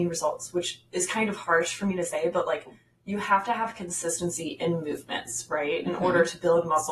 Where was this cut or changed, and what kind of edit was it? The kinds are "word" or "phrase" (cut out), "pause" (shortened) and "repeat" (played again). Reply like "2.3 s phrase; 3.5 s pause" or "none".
none